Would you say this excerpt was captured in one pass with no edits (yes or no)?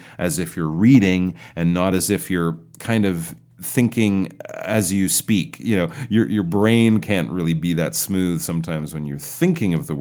yes